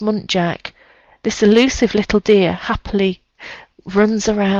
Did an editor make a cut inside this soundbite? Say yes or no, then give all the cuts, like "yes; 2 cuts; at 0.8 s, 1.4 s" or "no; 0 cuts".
no; 0 cuts